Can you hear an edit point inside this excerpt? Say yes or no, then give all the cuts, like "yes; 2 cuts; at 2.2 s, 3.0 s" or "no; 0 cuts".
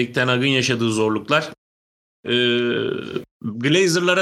yes; 1 cut; at 3.3 s